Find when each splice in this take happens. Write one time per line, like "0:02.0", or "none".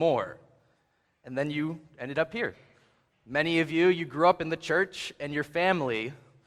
none